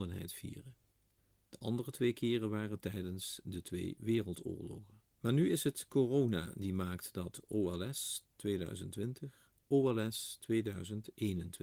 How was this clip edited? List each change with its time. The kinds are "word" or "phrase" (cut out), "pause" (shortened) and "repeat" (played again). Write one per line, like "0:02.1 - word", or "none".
0:01.2 - pause
0:05.1 - pause
0:09.6 - pause

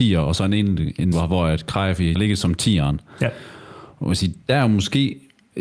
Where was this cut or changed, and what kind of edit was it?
0:01.1 - phrase
0:02.1 - phrase
0:04.4 - pause

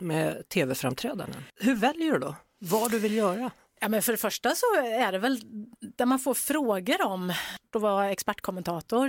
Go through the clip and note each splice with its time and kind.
0:01.5 - pause

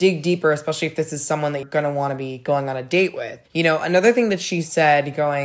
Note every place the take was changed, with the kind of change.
0:01.6 - word
0:03.5 - pause

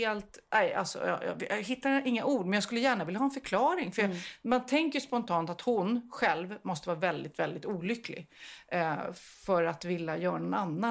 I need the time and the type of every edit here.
none

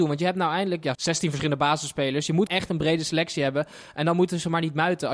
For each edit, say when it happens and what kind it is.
0:00.9 - phrase
0:02.5 - word

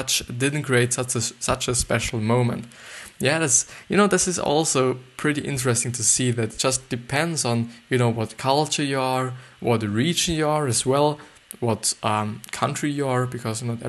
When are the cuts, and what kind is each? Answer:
0:06.6 - phrase

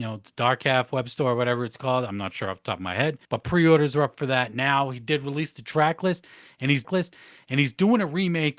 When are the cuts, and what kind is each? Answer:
0:03.2 - pause
0:06.8 - repeat

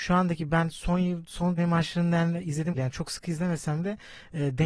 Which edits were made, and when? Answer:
0:01.6 - phrase
0:02.8 - word

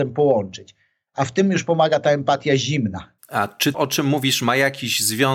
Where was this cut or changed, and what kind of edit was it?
0:03.2 - pause
0:03.7 - word

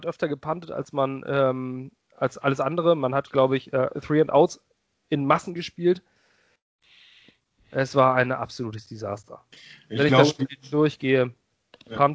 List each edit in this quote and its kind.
none

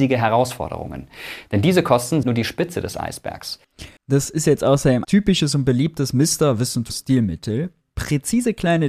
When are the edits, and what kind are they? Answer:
0:02.2 - word
0:04.0 - pause
0:05.0 - phrase
0:06.9 - word

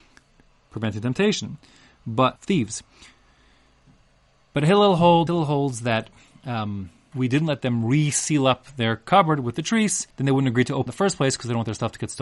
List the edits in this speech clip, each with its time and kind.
0:02.4 - word
0:05.3 - word
0:07.1 - word
0:10.1 - pause
0:10.9 - phrase

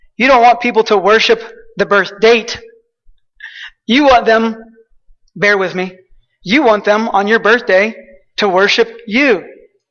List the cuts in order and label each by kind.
none

